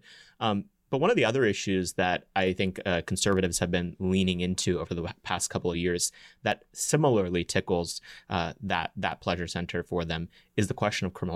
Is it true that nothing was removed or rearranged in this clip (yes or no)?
yes